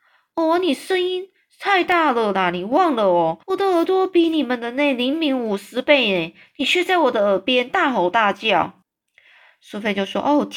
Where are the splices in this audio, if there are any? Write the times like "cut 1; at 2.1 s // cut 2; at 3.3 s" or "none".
cut 1; at 3.4 s // cut 2; at 8.8 s